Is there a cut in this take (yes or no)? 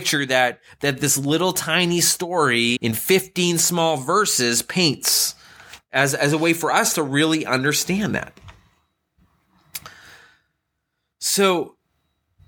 yes